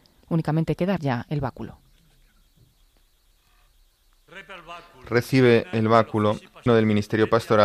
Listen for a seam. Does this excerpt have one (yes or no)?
yes